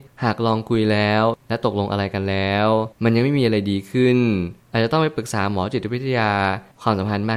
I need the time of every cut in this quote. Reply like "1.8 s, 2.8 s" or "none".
2.9 s